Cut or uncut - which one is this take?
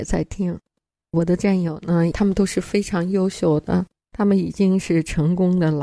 uncut